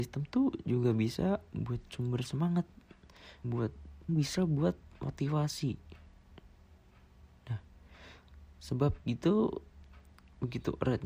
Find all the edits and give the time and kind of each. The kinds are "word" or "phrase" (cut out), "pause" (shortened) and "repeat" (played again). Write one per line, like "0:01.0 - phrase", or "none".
0:03.4 - word
0:04.1 - word
0:04.8 - pause